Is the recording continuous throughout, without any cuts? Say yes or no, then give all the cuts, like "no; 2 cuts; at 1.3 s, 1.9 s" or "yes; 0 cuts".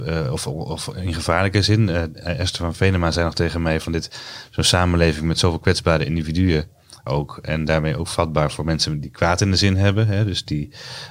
no; 1 cut; at 7.1 s